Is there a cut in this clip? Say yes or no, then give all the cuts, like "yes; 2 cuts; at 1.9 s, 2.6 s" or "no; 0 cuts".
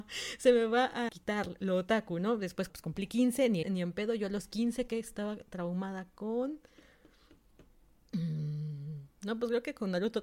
yes; 4 cuts; at 1.1 s, 2.7 s, 3.6 s, 4.9 s